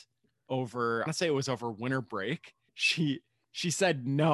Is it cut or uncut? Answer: cut